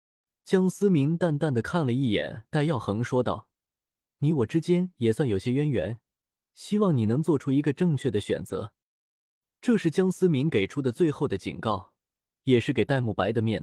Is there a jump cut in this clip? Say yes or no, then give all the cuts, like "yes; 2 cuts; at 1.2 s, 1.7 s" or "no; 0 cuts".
no; 0 cuts